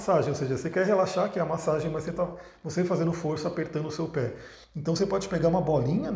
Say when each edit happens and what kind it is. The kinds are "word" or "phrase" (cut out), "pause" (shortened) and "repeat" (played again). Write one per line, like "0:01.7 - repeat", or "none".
0:04.6 - pause